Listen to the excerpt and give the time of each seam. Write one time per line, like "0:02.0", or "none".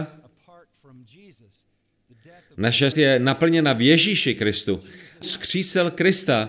0:02.9
0:05.2

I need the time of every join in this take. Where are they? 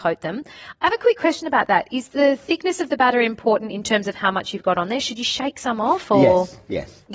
none

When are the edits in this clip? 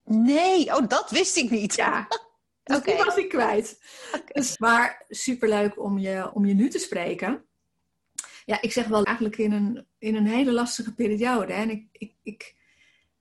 0:04.6
0:06.3
0:09.0
0:09.9

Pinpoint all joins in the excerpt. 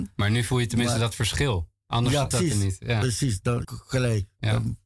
0:02.3
0:03.6

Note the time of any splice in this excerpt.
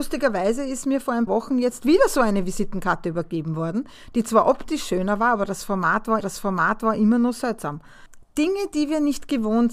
0:01.3
0:06.2

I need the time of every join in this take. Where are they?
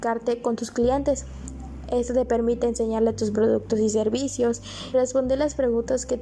0:04.9

